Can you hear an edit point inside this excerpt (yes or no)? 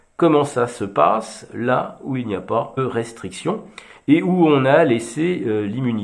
yes